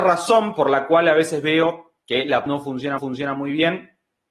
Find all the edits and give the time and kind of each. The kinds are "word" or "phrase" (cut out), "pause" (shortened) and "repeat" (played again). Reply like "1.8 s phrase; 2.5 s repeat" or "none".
2.5 s word; 3.0 s repeat